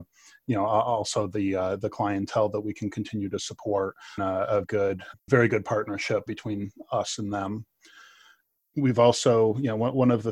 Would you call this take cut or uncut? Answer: cut